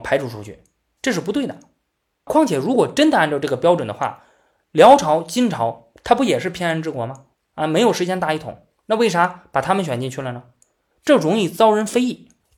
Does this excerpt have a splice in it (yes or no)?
no